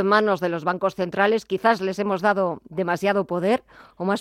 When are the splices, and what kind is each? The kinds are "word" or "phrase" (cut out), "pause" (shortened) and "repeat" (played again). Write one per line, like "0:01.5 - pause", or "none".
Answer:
none